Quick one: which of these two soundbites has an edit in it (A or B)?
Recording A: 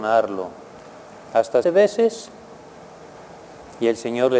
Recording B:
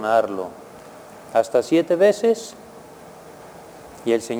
A